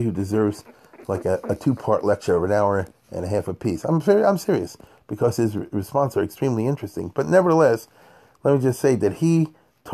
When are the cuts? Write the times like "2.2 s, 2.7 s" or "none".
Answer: none